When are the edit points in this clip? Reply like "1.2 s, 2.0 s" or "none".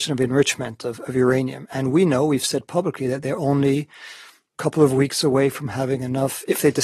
none